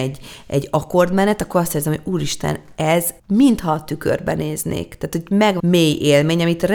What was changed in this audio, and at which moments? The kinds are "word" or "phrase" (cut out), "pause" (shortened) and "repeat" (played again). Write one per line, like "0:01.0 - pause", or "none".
0:03.2 - pause
0:05.6 - phrase